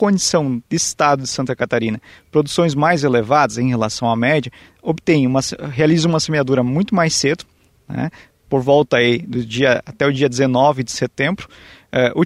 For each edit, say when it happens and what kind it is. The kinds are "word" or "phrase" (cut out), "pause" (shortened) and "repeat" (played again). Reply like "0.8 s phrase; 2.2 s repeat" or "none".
none